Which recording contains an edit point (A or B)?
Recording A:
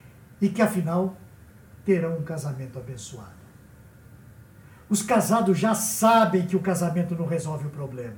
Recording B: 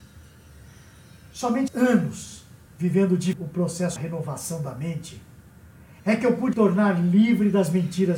B